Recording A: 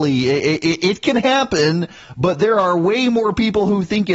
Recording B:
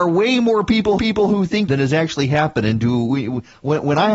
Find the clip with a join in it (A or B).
B